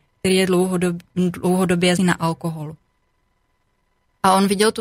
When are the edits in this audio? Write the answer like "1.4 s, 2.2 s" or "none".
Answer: 2.0 s